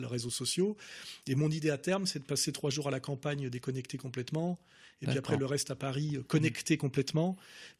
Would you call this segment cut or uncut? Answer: uncut